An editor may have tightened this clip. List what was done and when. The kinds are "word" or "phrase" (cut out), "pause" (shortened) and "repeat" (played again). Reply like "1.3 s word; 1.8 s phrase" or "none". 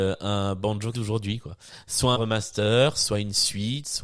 0.9 s word; 2.1 s word